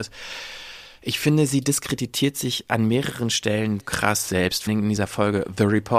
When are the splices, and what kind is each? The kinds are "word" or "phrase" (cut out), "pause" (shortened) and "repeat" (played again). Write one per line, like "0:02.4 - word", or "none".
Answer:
0:03.8 - word
0:04.7 - word